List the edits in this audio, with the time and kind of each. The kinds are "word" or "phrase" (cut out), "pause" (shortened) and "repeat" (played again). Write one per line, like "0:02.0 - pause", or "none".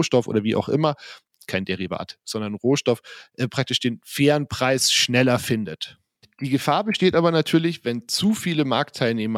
none